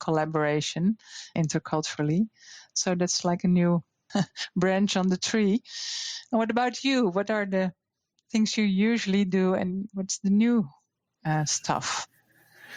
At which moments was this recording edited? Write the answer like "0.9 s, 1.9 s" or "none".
1.4 s, 4.1 s